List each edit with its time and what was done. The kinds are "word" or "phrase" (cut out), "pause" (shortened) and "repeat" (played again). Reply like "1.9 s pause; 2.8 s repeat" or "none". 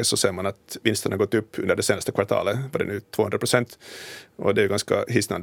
none